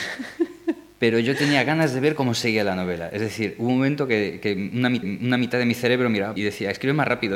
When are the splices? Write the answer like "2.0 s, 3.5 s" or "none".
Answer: 5.0 s, 6.4 s